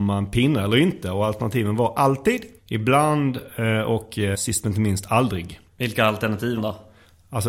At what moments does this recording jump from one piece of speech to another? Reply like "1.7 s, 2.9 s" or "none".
2.6 s, 4.3 s, 5.7 s, 6.6 s